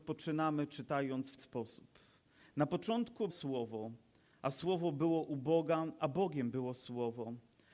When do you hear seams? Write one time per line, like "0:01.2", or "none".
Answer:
0:01.4
0:03.3